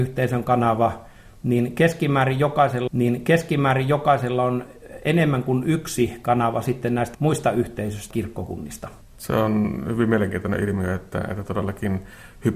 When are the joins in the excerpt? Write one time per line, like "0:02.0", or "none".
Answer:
0:02.9
0:07.1
0:08.1
0:09.0